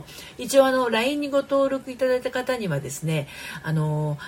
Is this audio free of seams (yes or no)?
yes